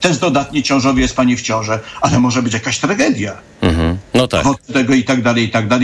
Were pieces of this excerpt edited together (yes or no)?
yes